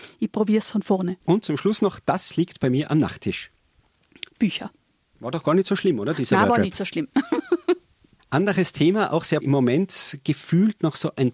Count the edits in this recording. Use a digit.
2